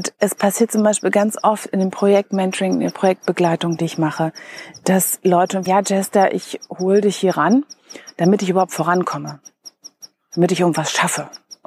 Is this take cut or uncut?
cut